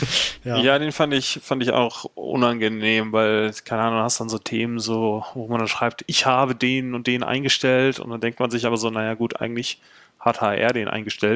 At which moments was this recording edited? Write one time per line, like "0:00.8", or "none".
none